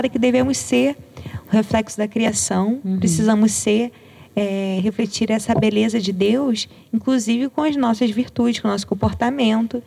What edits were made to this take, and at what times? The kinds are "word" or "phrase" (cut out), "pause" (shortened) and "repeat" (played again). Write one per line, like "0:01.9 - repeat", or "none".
none